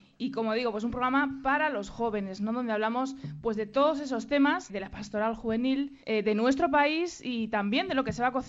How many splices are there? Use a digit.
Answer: 2